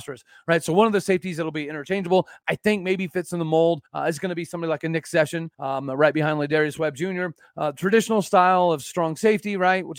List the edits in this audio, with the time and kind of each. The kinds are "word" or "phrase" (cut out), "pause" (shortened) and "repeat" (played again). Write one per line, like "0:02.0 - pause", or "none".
0:03.9 - pause
0:05.5 - pause